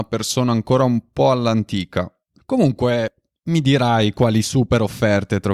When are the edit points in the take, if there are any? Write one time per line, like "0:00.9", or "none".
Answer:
none

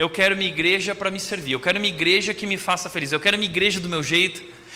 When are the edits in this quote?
none

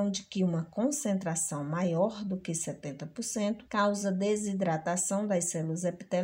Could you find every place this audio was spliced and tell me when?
0:03.7

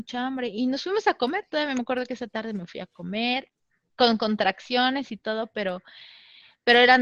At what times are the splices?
none

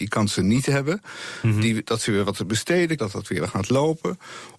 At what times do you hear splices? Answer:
0:03.0

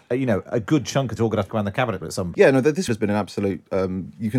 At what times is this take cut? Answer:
0:01.2
0:01.5
0:02.0
0:02.3
0:02.9

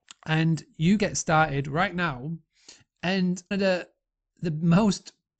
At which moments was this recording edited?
0:01.0
0:03.5

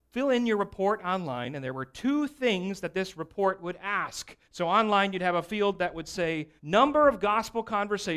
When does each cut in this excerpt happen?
0:04.4
0:06.6

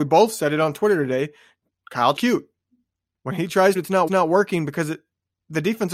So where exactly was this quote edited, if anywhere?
0:02.2
0:03.7
0:04.1

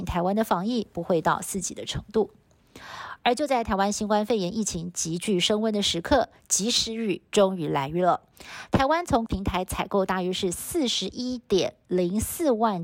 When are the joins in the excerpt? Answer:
0:09.3

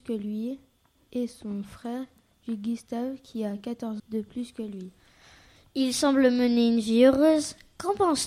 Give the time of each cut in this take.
0:04.0

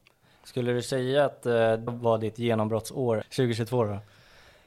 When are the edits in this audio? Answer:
0:01.9
0:03.2

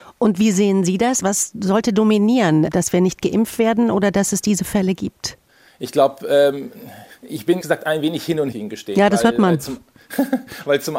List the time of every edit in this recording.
0:07.2
0:07.6
0:08.5

